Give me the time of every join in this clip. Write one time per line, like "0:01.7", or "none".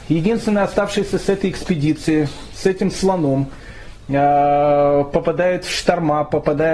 none